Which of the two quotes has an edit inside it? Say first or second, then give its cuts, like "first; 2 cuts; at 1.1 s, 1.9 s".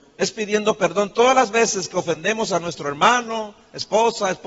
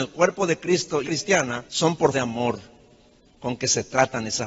second; 3 cuts; at 1.0 s, 1.7 s, 2.1 s